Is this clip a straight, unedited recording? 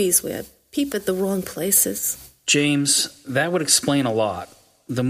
no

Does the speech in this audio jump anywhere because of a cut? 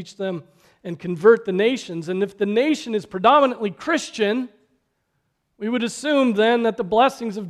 no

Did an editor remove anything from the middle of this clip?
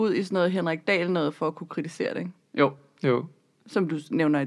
no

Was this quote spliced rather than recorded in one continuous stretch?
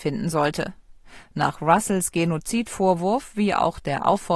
no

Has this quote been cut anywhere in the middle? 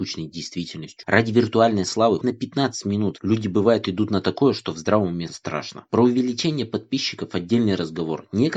yes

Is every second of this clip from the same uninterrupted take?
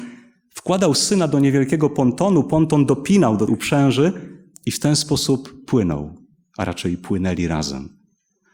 no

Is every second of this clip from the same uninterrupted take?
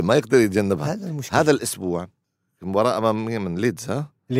no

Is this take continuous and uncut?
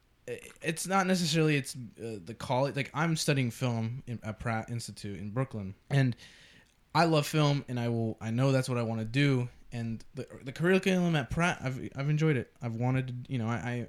no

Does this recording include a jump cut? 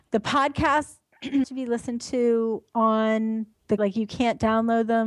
yes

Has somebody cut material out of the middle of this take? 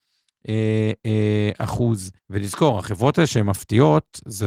yes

